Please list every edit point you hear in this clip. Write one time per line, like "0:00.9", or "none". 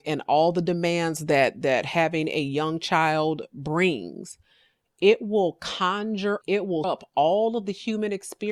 0:06.4
0:06.8